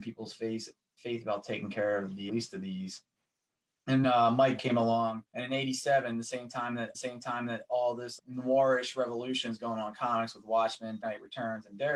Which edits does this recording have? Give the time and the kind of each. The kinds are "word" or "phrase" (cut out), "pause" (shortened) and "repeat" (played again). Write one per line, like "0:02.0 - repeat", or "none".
0:02.3 - word
0:04.0 - word
0:04.6 - word
0:05.3 - pause
0:06.9 - repeat
0:08.2 - word
0:11.0 - word